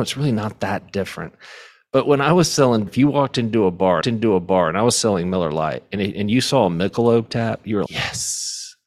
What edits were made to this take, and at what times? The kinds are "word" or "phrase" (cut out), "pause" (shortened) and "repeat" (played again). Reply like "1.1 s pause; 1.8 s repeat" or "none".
2.9 s word; 4.0 s repeat; 7.9 s word